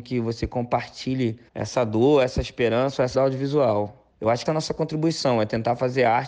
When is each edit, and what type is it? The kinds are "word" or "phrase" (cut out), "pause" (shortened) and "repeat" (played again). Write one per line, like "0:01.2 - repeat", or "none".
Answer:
0:01.5 - pause
0:03.1 - phrase
0:04.1 - pause
0:04.5 - phrase